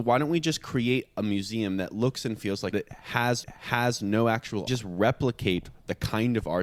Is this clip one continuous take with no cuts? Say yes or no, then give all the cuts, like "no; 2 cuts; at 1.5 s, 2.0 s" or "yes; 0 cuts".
no; 3 cuts; at 2.7 s, 3.4 s, 4.7 s